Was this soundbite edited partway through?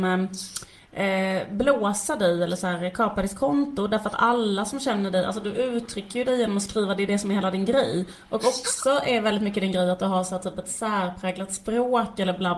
no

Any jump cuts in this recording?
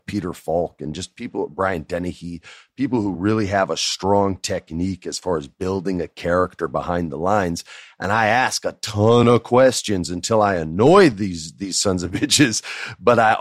no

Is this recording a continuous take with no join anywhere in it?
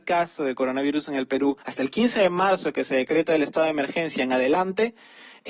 no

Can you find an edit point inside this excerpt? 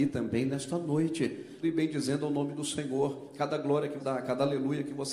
yes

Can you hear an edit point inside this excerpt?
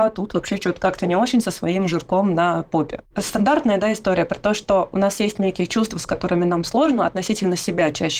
yes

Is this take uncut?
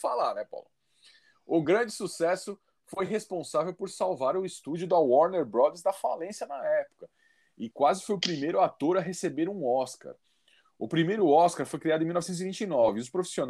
yes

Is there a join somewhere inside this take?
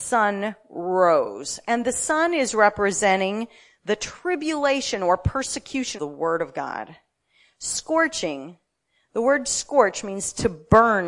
yes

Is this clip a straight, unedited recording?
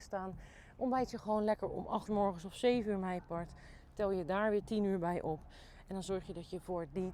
no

